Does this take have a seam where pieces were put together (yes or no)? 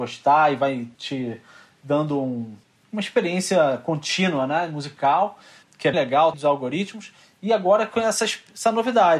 yes